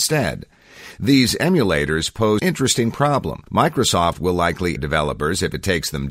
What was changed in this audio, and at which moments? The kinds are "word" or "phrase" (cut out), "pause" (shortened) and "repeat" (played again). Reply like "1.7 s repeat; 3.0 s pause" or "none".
2.4 s word; 3.5 s pause; 4.8 s word